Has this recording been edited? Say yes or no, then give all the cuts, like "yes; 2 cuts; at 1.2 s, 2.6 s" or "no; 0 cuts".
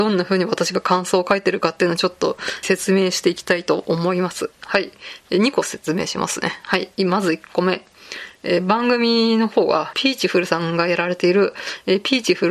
yes; 2 cuts; at 2.6 s, 9.9 s